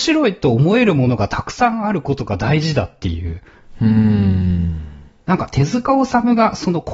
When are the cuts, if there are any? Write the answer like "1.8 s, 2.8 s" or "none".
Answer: none